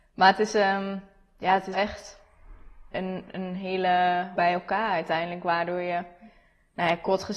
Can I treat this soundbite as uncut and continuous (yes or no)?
no